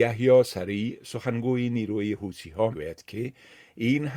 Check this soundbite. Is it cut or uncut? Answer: cut